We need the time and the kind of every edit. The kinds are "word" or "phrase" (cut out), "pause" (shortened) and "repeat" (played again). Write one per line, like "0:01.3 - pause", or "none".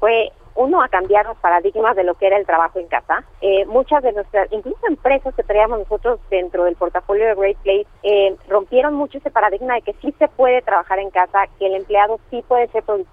0:03.3 - pause
0:08.0 - pause